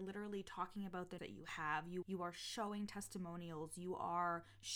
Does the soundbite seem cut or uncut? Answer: cut